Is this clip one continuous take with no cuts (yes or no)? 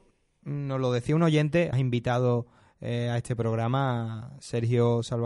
no